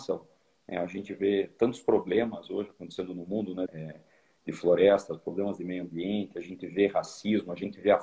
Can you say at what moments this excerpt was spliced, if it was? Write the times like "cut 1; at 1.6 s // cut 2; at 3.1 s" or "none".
cut 1; at 3.7 s